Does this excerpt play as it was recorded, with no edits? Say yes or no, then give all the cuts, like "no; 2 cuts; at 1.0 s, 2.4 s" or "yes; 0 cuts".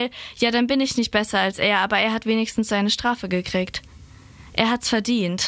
yes; 0 cuts